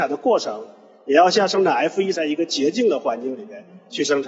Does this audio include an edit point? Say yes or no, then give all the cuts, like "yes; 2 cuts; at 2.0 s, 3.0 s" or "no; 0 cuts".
yes; 1 cut; at 2.1 s